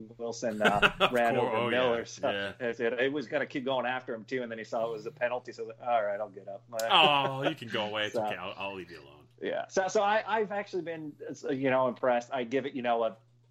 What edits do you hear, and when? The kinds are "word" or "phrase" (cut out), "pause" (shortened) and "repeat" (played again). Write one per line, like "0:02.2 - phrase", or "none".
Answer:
none